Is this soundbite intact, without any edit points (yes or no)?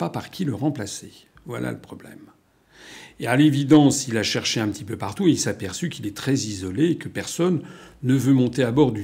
yes